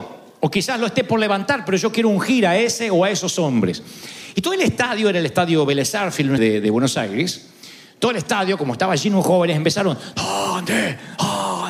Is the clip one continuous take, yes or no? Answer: no